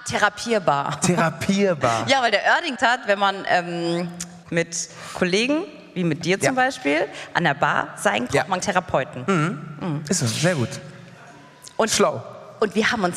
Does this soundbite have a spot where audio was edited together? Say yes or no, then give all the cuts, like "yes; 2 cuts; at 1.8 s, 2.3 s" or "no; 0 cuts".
yes; 4 cuts; at 2.8 s, 4.4 s, 8.3 s, 8.6 s